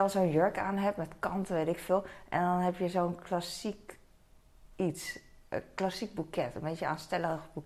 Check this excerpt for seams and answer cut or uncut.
uncut